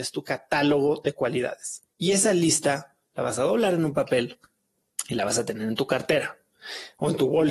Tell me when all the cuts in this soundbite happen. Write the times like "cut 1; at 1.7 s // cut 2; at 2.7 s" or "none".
cut 1; at 1.9 s